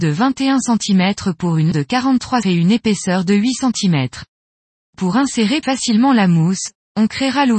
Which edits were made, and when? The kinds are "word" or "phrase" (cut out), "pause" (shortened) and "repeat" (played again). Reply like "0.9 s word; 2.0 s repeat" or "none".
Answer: 1.7 s word; 2.4 s word; 5.6 s word